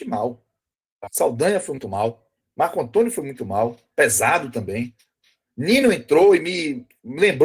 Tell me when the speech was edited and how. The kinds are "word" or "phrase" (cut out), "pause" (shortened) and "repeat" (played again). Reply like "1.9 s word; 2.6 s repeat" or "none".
none